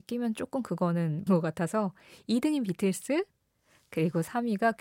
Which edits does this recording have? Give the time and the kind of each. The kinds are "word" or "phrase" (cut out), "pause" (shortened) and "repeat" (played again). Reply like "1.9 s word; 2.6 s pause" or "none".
1.3 s word